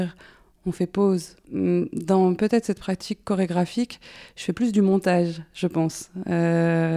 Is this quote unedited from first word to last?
yes; 0 cuts

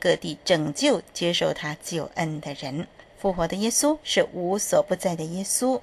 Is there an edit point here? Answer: yes; 1 cut; at 3.0 s

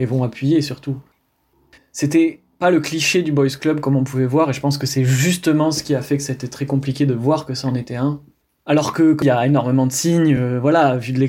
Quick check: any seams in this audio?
no; 0 cuts

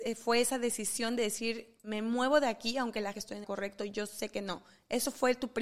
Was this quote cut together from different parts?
yes; 2 cuts; at 3.1 s, 3.4 s

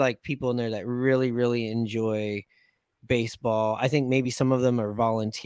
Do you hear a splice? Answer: no; 0 cuts

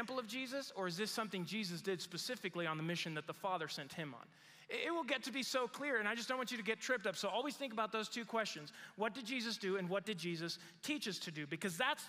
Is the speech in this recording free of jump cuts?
yes; 0 cuts

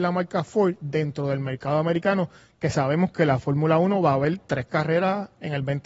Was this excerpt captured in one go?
yes; 0 cuts

